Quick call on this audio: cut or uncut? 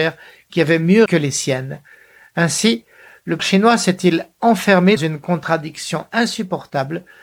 cut